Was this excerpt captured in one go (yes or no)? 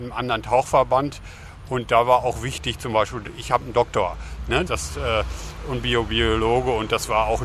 no